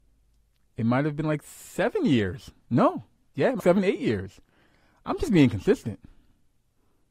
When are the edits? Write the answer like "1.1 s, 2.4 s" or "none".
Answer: 3.6 s

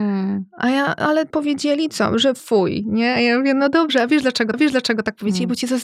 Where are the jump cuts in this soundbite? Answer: 1.3 s, 4.5 s

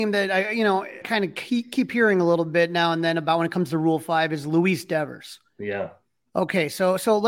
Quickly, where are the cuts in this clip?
1.0 s

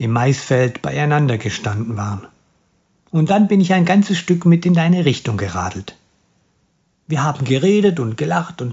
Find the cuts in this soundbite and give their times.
none

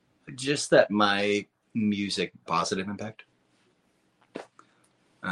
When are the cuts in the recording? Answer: 2.5 s

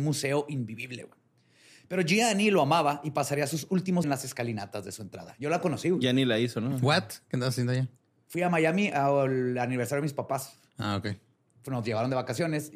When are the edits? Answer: 4.0 s

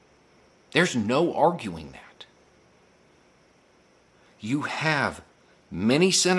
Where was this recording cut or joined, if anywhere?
none

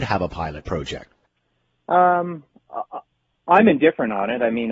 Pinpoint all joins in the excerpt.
none

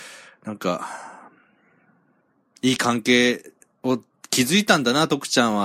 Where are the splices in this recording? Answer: none

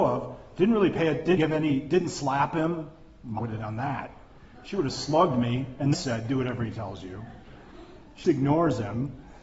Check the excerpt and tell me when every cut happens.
1.4 s, 3.4 s, 5.9 s, 8.2 s

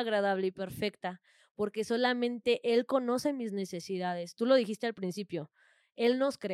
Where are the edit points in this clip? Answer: none

